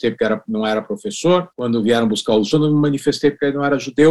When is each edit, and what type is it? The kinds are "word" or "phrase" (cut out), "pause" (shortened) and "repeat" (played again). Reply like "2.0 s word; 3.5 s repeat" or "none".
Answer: 1.5 s pause; 2.5 s word